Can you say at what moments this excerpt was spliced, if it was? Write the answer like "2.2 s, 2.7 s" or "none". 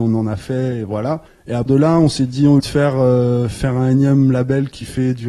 1.3 s, 1.7 s, 2.6 s

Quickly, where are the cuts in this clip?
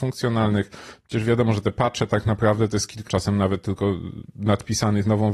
3.1 s

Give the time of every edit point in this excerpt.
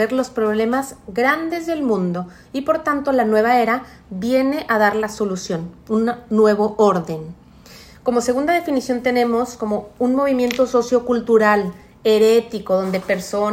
none

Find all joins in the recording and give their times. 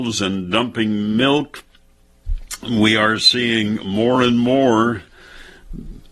none

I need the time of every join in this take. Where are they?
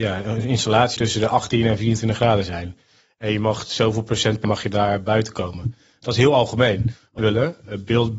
1.0 s, 4.4 s, 7.2 s

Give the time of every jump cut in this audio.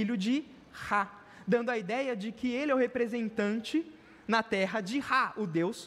none

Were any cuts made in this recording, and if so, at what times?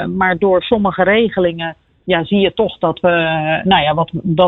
none

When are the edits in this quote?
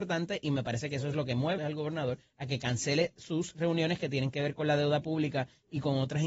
1.6 s

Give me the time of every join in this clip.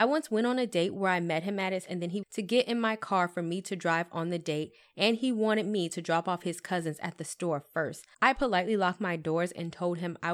1.9 s, 2.2 s, 8.1 s

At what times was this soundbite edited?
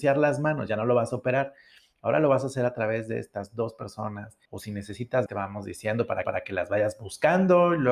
4.5 s, 5.3 s, 6.2 s

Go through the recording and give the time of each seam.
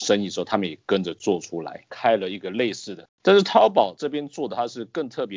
3.1 s

